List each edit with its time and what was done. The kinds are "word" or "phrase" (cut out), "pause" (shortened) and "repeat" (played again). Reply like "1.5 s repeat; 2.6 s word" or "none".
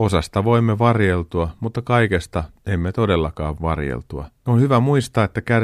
2.6 s pause; 3.6 s word; 4.4 s pause